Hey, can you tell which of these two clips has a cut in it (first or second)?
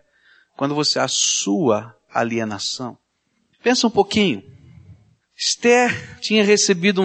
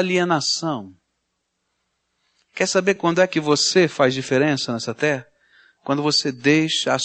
first